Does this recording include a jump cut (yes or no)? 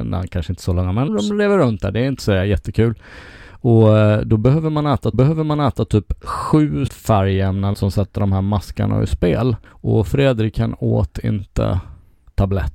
yes